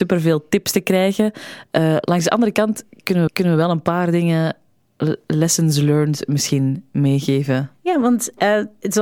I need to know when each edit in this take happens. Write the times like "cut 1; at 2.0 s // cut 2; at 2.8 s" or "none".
cut 1; at 3.3 s